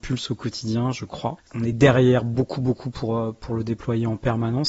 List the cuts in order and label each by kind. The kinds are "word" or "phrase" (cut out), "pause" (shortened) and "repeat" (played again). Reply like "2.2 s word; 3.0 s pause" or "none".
none